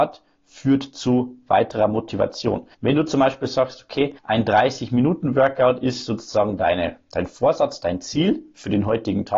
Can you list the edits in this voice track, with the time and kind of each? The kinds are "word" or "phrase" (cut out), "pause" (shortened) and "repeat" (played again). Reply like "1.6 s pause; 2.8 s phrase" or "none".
2.7 s pause; 4.2 s pause

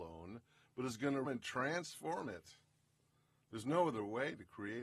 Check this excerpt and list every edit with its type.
1.2 s word

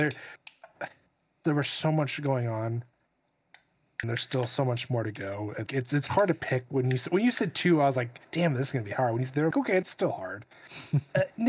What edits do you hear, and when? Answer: 1.4 s word; 4.0 s word; 5.7 s word; 8.2 s pause; 9.5 s word; 9.8 s phrase

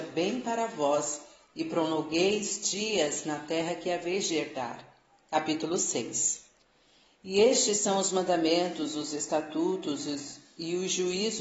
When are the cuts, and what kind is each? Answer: none

